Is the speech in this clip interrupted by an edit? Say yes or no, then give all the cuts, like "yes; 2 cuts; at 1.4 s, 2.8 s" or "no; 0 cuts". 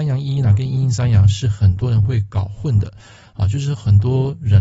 no; 0 cuts